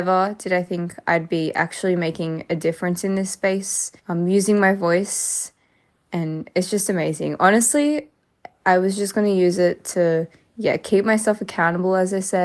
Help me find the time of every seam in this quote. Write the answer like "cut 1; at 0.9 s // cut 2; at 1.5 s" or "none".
cut 1; at 4.0 s